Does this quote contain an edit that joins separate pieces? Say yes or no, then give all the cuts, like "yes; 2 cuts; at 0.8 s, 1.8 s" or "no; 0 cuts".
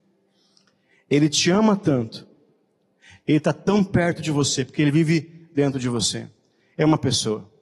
no; 0 cuts